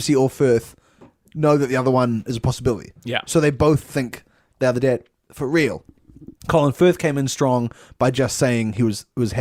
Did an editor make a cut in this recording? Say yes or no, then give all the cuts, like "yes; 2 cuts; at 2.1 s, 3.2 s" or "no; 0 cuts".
yes; 1 cut; at 6.4 s